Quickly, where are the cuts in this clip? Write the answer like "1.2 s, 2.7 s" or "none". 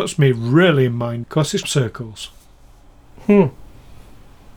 1.2 s, 1.6 s